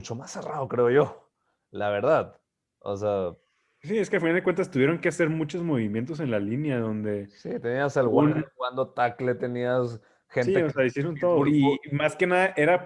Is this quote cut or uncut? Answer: uncut